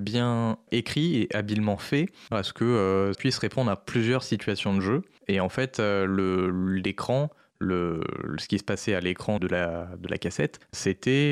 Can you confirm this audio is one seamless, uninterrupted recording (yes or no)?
no